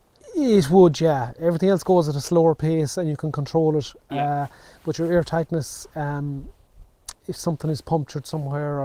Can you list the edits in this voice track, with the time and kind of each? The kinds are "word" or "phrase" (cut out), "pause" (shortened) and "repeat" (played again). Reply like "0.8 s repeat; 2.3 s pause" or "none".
7.2 s pause